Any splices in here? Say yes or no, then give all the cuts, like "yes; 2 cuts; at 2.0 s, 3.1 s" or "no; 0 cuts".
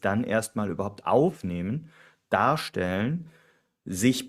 no; 0 cuts